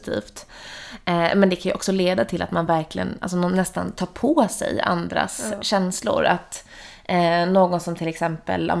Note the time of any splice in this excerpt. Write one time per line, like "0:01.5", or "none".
none